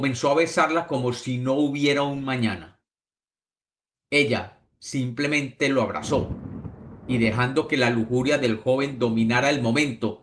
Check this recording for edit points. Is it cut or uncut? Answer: uncut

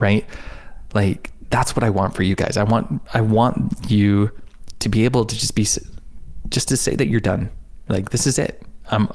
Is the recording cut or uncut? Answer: uncut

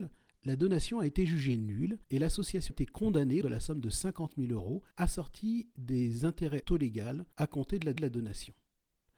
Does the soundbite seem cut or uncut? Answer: cut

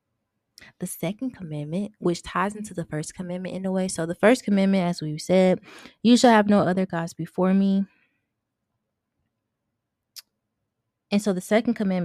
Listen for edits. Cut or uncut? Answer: uncut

